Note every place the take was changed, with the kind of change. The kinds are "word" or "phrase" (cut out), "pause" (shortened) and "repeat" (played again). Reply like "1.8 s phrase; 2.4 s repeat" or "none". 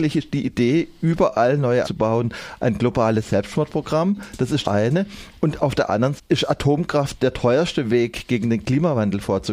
1.8 s word; 4.6 s word; 6.2 s word